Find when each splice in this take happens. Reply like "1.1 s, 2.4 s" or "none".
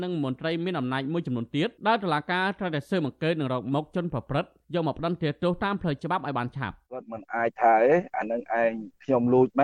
1.8 s, 6.9 s